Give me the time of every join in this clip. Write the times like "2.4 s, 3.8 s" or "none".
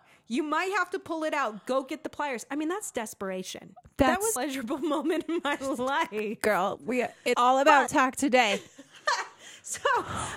4.4 s, 7.3 s, 7.9 s